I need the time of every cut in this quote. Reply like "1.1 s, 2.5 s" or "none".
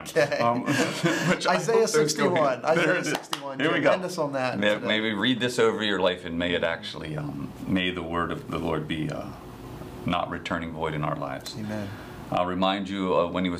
none